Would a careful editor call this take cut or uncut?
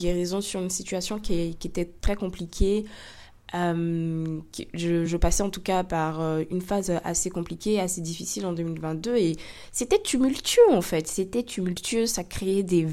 uncut